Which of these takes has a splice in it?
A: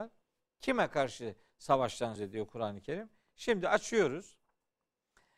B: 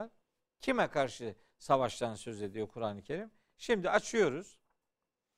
A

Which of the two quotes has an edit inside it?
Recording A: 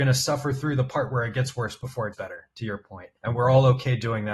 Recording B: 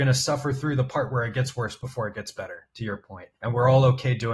A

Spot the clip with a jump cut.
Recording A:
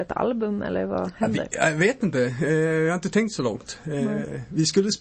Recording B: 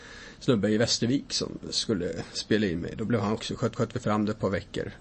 B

